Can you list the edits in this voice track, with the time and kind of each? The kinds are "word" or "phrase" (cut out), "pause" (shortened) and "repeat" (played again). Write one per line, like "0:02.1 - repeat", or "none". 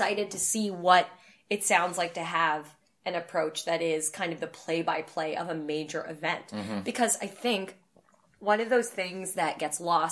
none